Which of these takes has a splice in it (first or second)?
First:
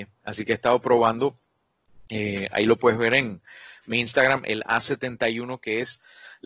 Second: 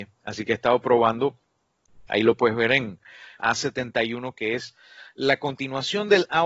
second